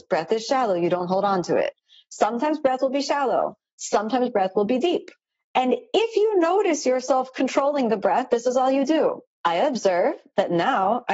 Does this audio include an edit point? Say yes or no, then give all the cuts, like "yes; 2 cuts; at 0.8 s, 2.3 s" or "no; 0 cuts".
no; 0 cuts